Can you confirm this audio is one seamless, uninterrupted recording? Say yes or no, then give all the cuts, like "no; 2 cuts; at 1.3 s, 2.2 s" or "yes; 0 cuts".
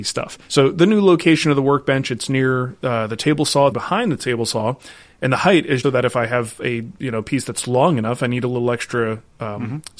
no; 2 cuts; at 3.7 s, 5.8 s